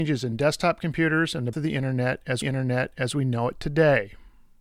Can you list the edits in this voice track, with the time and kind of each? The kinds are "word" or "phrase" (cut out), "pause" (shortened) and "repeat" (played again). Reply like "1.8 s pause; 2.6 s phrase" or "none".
1.5 s word; 2.4 s repeat